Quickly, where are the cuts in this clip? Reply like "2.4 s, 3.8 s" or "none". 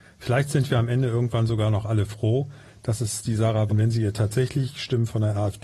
3.7 s